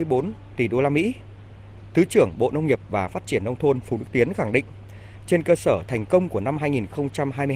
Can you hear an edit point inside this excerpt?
no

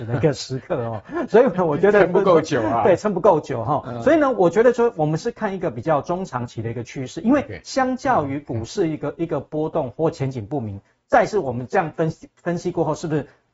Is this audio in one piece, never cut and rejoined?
yes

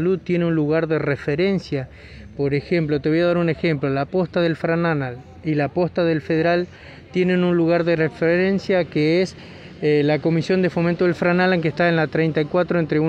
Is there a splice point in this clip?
no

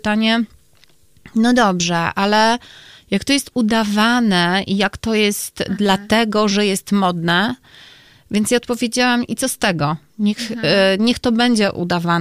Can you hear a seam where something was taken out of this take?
no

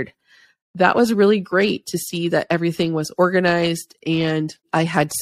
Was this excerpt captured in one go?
yes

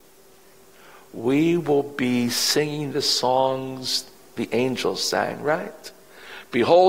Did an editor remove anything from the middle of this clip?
no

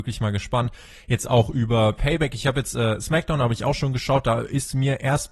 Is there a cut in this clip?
no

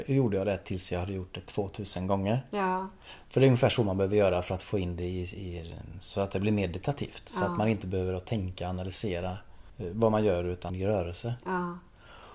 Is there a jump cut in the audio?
yes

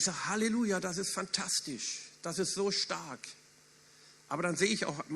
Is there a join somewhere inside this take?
no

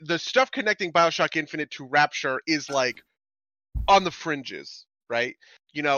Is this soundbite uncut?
yes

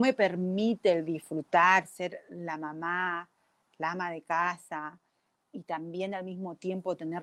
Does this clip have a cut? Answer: no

